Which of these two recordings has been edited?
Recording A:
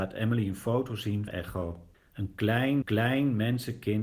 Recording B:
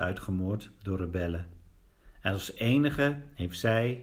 A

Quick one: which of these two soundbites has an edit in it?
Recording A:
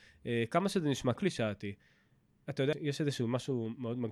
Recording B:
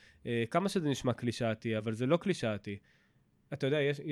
A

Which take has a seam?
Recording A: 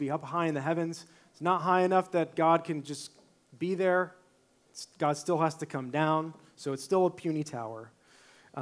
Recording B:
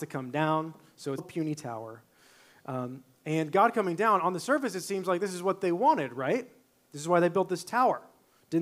B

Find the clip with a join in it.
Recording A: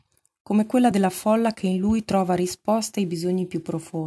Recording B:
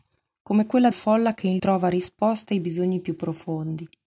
B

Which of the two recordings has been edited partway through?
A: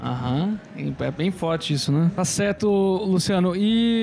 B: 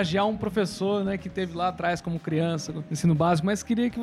A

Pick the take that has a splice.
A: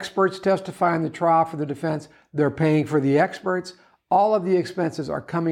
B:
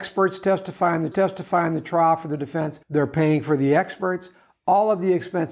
B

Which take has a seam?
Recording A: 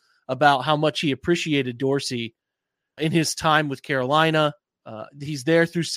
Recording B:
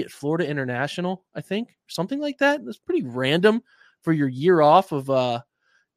A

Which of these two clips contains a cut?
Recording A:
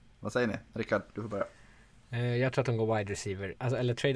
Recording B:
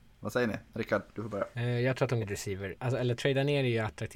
B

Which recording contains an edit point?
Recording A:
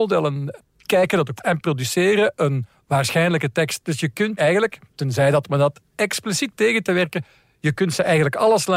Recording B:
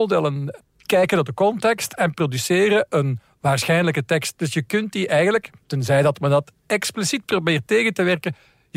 A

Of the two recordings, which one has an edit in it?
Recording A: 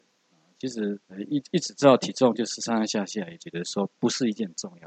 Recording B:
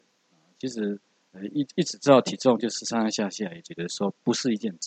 A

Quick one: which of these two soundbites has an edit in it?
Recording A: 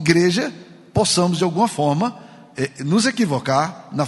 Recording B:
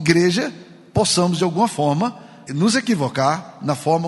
B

